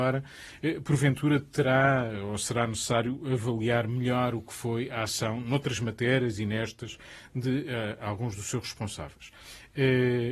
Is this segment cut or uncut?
uncut